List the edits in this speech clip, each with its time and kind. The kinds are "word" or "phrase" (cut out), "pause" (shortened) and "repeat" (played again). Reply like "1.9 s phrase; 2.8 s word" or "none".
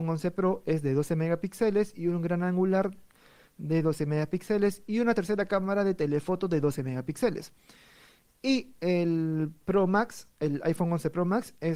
none